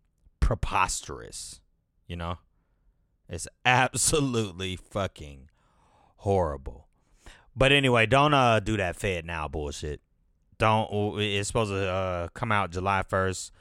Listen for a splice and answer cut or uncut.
uncut